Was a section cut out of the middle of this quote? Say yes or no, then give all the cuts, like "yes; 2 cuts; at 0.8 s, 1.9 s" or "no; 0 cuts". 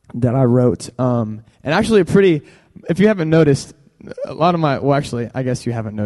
yes; 1 cut; at 1.5 s